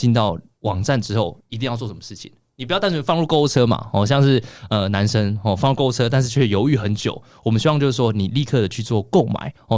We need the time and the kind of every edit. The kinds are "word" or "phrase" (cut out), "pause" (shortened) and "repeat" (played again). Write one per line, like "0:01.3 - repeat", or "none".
none